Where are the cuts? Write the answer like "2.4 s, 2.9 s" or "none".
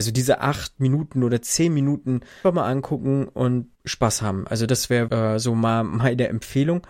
2.4 s, 3.7 s, 5.1 s